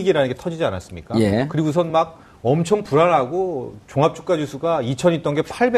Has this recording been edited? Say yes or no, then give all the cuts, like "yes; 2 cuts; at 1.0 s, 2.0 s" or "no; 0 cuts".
no; 0 cuts